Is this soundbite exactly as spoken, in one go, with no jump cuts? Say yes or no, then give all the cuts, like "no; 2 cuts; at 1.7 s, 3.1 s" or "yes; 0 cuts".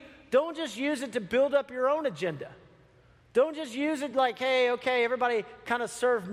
yes; 0 cuts